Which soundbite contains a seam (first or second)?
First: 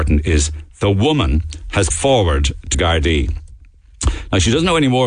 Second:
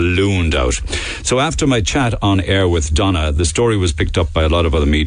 first